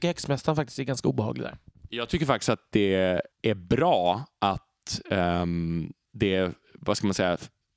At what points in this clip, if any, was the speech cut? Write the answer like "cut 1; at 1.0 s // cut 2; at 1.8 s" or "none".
cut 1; at 3.3 s

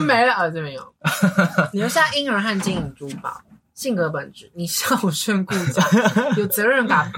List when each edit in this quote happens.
none

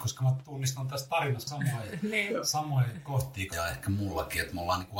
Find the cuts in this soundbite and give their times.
cut 1; at 1.5 s // cut 2; at 3.5 s

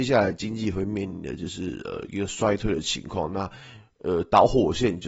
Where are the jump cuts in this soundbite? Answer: none

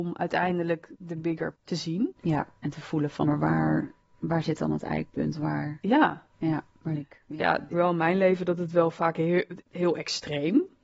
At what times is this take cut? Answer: cut 1; at 1.5 s // cut 2; at 3.2 s // cut 3; at 6.9 s // cut 4; at 7.7 s // cut 5; at 9.6 s

